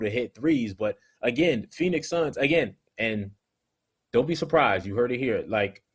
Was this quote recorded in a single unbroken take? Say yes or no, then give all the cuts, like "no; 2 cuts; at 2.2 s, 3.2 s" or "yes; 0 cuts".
yes; 0 cuts